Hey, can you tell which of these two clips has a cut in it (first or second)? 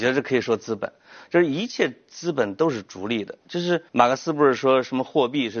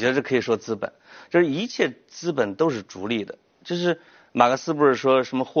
first